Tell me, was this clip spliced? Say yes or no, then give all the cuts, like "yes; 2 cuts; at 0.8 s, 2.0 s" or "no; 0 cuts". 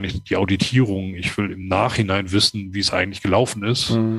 no; 0 cuts